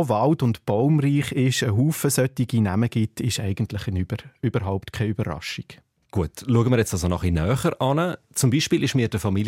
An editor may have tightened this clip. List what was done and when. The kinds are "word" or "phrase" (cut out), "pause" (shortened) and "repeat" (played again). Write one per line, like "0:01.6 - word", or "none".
none